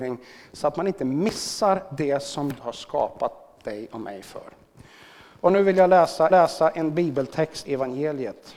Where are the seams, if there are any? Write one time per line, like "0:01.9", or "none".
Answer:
0:02.6
0:06.3
0:07.6